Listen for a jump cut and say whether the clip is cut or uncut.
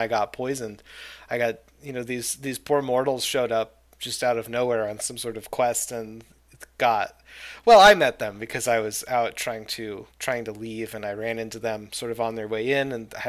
cut